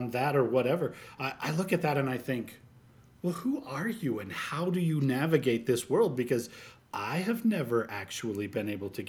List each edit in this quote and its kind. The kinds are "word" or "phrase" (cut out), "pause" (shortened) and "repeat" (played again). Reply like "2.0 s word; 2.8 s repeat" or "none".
none